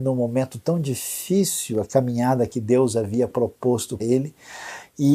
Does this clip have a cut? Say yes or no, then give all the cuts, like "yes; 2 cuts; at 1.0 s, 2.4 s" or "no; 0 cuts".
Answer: yes; 1 cut; at 4.0 s